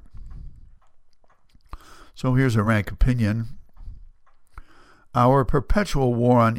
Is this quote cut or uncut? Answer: uncut